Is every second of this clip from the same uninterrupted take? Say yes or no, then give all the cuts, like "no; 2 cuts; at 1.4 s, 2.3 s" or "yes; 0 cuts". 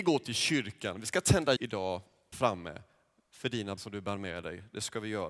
no; 3 cuts; at 1.6 s, 2.3 s, 3.8 s